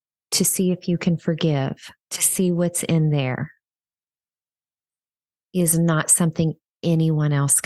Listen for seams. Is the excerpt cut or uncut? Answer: cut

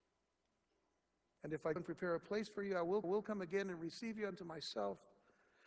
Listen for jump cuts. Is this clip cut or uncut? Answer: cut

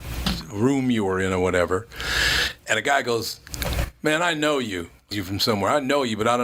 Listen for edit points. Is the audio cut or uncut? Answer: cut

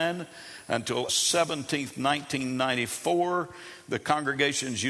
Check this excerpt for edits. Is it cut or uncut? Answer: cut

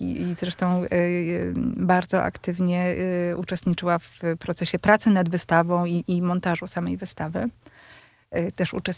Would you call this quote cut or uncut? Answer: uncut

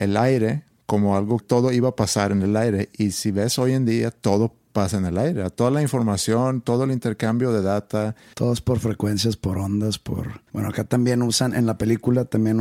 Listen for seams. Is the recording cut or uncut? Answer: cut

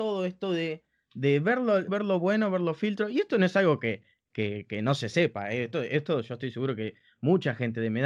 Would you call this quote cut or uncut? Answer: cut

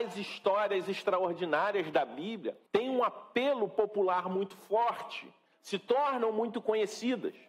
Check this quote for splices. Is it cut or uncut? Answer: cut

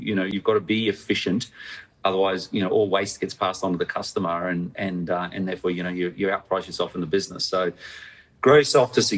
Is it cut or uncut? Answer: uncut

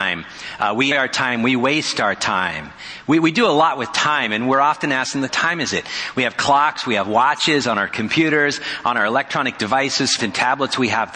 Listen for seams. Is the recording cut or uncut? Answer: cut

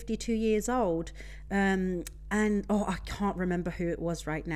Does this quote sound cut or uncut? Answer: uncut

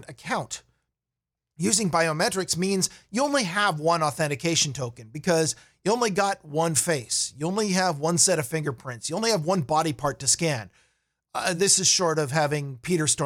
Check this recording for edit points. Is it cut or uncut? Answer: uncut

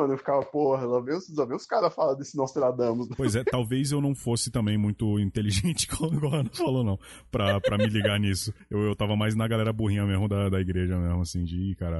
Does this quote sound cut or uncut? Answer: uncut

